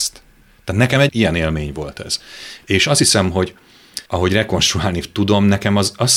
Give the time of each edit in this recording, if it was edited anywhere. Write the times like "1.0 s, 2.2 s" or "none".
1.1 s, 4.1 s